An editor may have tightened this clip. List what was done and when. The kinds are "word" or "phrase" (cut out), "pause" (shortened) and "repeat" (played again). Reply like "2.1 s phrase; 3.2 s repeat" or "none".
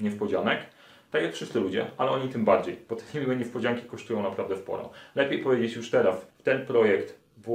6.3 s pause